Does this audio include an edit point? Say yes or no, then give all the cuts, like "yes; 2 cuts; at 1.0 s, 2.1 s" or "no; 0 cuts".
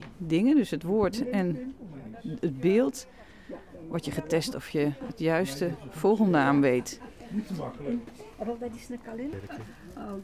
no; 0 cuts